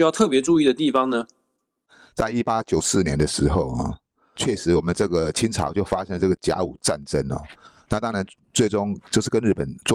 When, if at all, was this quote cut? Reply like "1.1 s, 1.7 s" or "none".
4.4 s

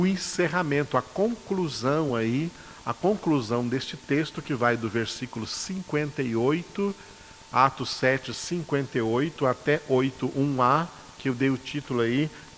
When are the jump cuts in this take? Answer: none

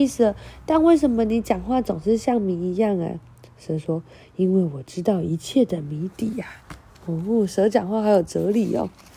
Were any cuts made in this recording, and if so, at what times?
6.6 s

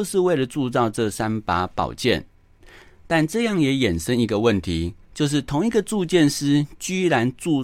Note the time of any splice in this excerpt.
none

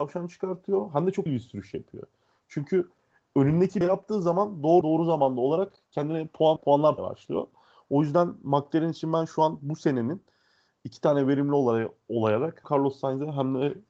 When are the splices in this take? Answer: 1.3 s, 3.8 s, 4.8 s, 6.6 s, 7.0 s, 12.6 s

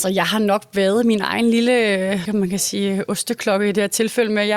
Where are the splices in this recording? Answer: 2.2 s

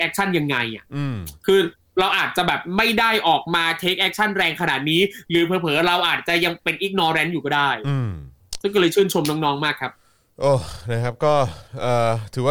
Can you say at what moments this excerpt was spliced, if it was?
1.3 s

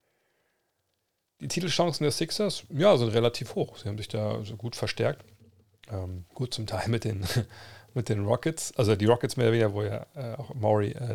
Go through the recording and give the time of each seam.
6.3 s

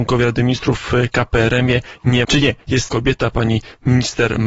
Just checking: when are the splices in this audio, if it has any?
2.2 s, 2.9 s

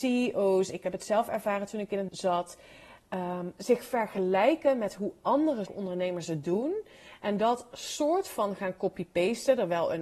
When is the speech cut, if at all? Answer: 2.1 s, 5.7 s

